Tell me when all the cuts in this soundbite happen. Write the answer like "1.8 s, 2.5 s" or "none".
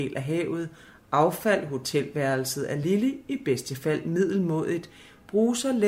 none